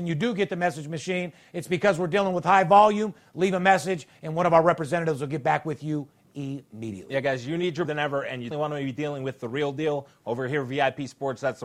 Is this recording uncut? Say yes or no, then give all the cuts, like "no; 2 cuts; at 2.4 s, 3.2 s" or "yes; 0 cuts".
no; 2 cuts; at 7.8 s, 8.5 s